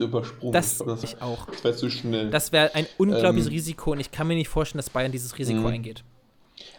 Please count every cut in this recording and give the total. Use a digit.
1